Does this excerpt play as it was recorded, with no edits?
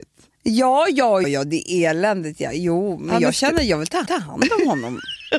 no; 2 cuts; at 1.2 s, 4.1 s

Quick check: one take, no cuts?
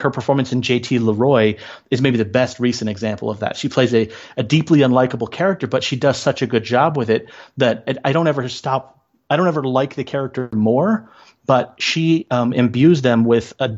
yes; 0 cuts

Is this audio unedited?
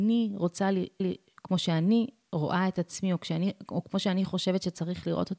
no; 1 cut; at 1.0 s

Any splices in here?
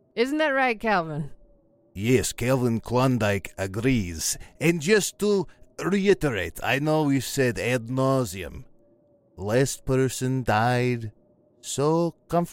no; 0 cuts

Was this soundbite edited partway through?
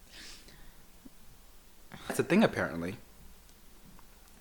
yes; 1 cut; at 2.1 s

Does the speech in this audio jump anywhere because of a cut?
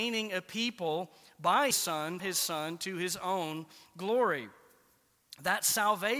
yes; 2 cuts; at 1.7 s, 2.2 s

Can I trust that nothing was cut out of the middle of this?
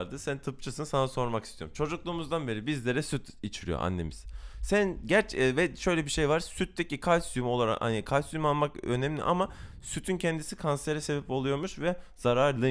yes; 0 cuts

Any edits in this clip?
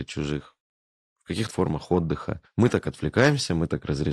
yes; 2 cuts; at 1.5 s, 2.4 s

